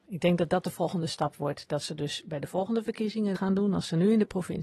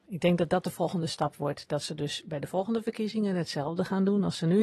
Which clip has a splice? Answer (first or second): first